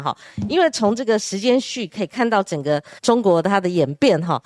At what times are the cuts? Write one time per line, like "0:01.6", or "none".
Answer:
0:03.0